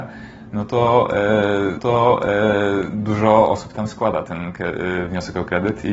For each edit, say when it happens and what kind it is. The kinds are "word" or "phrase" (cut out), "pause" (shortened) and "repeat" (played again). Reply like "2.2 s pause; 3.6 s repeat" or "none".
1.8 s repeat